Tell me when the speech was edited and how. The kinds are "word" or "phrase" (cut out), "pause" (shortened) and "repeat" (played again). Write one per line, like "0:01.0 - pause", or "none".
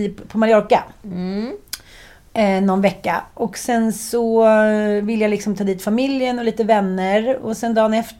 none

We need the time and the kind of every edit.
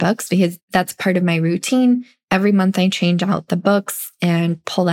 none

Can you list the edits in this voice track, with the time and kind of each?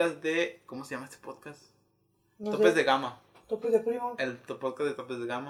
none

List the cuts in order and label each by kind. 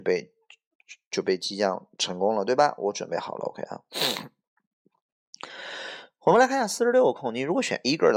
none

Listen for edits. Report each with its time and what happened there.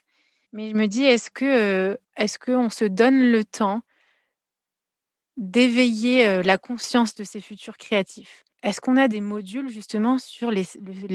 0:08.5 - pause

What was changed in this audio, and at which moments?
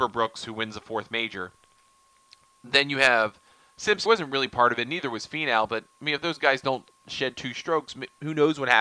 0:04.1 - word

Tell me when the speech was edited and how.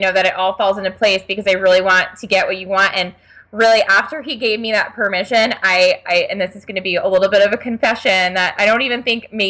none

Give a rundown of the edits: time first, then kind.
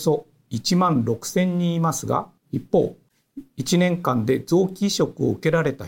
0:02.4 - pause

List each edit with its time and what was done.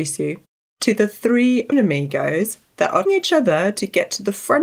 0:01.7 - word
0:03.0 - word

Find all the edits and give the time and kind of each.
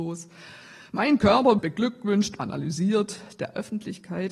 0:01.6 - word
0:02.4 - word

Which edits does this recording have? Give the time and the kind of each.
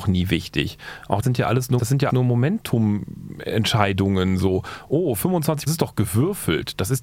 0:01.2 - phrase
0:01.8 - word
0:02.1 - word
0:05.7 - phrase

